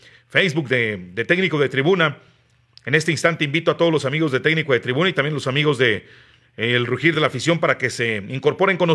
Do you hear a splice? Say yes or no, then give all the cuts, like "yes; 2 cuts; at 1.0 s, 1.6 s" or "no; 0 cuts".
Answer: no; 0 cuts